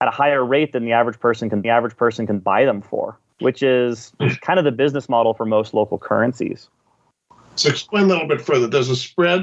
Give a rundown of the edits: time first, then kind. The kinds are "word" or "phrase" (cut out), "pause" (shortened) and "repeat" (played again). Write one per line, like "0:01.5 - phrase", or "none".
0:01.6 - repeat
0:03.3 - pause
0:07.2 - pause